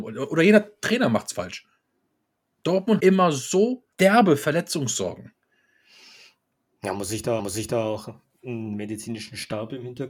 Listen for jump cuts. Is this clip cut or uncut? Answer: cut